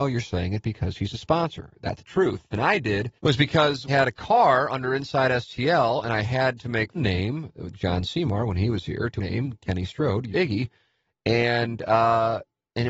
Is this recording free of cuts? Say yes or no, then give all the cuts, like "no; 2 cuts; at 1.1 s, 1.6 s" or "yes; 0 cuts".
no; 7 cuts; at 2.0 s, 2.5 s, 3.2 s, 3.9 s, 6.9 s, 9.2 s, 10.3 s